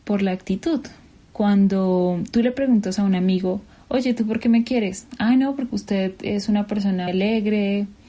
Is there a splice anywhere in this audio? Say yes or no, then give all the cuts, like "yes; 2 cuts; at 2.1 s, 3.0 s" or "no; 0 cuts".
yes; 1 cut; at 7.1 s